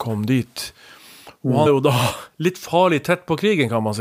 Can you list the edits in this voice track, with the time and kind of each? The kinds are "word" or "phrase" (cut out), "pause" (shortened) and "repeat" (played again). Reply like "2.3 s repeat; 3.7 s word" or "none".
1.7 s phrase

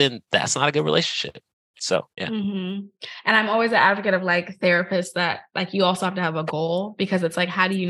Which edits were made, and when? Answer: 2.1 s pause

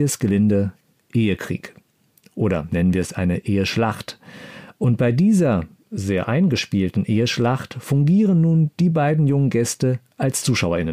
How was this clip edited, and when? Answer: none

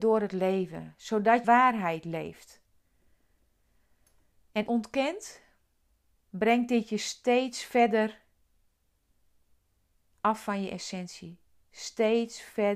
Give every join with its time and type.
1.4 s phrase; 4.7 s phrase

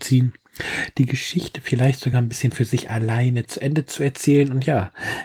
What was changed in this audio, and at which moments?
none

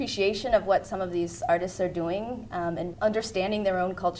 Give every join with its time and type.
2.9 s word

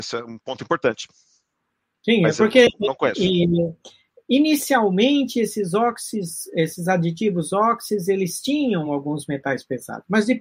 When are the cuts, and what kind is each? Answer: none

